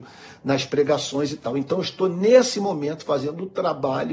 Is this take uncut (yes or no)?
yes